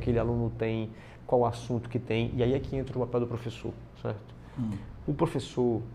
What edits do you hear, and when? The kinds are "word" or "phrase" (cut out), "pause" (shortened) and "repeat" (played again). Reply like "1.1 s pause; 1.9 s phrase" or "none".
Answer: 3.9 s pause